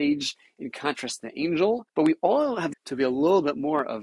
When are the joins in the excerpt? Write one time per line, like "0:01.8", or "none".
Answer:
0:01.9
0:02.7